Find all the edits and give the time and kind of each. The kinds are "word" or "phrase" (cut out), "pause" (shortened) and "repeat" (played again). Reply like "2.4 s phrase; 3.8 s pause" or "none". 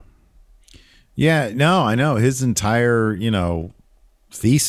none